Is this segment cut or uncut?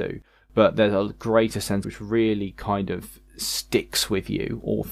cut